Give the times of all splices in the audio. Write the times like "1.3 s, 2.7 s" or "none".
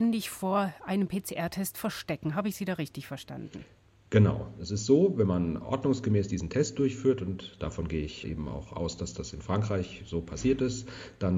none